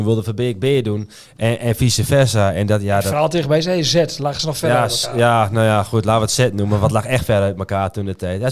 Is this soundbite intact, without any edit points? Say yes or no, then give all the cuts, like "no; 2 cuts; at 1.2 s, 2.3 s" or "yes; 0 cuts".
yes; 0 cuts